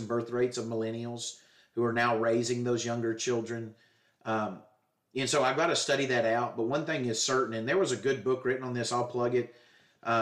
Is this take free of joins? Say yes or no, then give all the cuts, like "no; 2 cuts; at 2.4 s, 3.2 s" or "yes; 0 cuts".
yes; 0 cuts